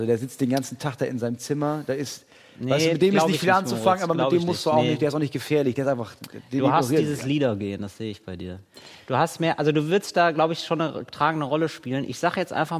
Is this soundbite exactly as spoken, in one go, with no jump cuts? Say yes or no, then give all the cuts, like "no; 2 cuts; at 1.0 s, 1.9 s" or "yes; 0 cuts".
yes; 0 cuts